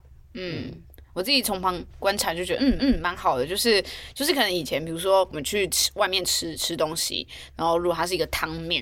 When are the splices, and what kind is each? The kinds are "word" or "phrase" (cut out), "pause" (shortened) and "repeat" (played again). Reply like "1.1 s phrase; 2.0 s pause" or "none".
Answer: 2.8 s repeat